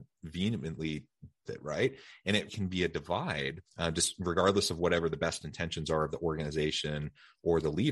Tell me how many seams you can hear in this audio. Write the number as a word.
three